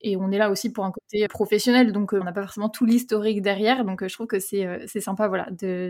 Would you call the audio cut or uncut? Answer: cut